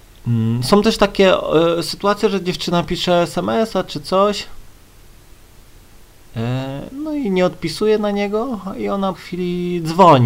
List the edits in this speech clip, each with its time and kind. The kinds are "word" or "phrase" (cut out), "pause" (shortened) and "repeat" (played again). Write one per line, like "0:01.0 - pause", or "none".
0:09.1 - word